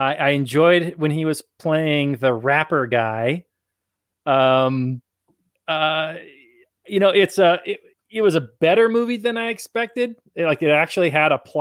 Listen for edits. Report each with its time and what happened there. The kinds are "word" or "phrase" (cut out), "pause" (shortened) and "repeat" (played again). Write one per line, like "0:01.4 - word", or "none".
none

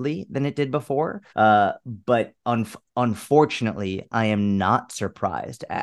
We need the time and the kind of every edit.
0:01.3 - pause
0:02.4 - pause

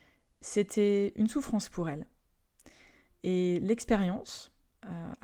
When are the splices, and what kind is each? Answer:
none

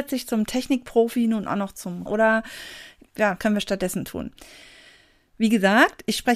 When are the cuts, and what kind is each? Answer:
0:02.1 - phrase
0:03.4 - word

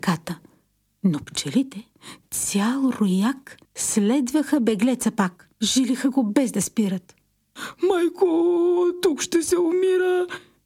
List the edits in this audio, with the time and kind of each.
0:03.6 - pause
0:05.5 - pause

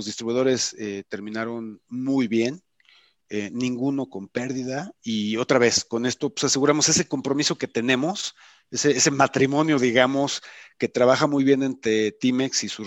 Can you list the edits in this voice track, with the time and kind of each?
none

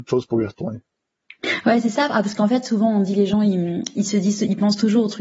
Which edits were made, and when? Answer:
none

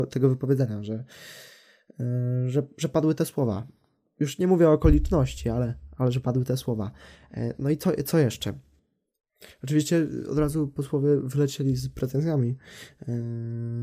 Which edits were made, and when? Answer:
none

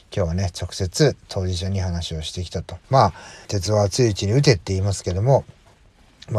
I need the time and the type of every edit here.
0:02.8 - pause
0:03.4 - phrase

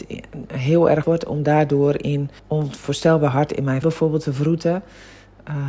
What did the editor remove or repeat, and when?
0:01.0 - word
0:02.4 - pause
0:03.8 - word

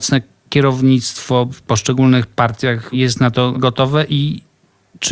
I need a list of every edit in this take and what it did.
none

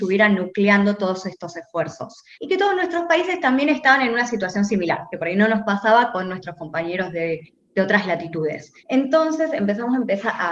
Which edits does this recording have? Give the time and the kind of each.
0:02.3 - pause
0:08.8 - pause

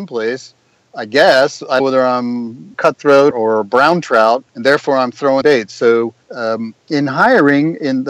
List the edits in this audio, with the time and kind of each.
0:01.8 - phrase
0:02.7 - phrase
0:03.3 - word
0:04.5 - pause
0:05.4 - phrase
0:06.2 - pause

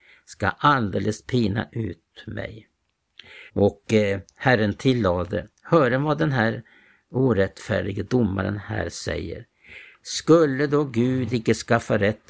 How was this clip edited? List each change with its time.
0:03.5 - pause

